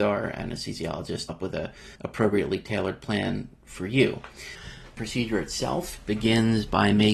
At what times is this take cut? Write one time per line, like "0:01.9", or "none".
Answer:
0:01.3
0:02.0
0:03.6
0:05.0